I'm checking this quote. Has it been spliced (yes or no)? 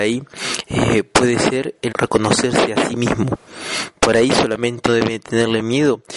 yes